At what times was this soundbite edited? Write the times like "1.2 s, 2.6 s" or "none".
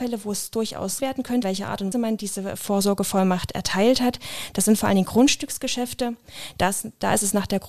1.0 s, 1.4 s, 1.9 s

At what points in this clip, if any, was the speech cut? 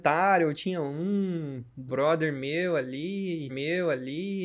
1.9 s, 3.5 s

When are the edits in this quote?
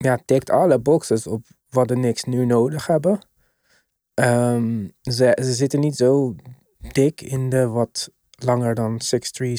none

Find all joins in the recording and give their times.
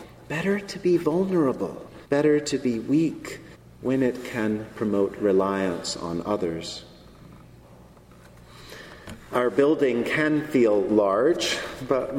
2.0 s, 3.5 s

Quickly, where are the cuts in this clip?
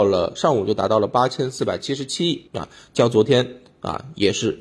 2.5 s

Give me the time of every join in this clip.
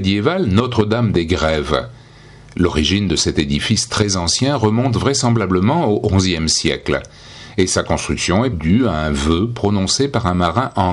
8.5 s

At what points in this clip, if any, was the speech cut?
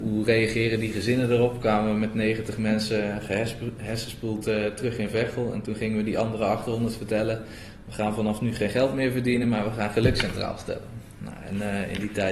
none

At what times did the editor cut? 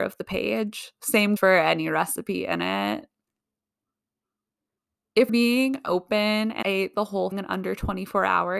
1.4 s, 5.3 s, 6.6 s, 7.3 s

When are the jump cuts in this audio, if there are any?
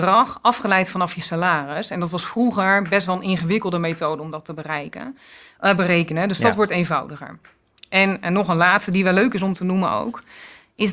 none

